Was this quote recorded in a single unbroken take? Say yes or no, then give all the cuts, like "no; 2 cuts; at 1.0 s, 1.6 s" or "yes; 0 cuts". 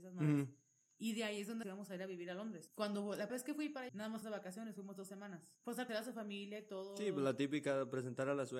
no; 5 cuts; at 1.6 s, 3.3 s, 3.9 s, 4.2 s, 5.9 s